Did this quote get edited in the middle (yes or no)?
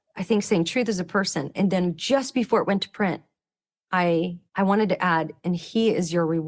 yes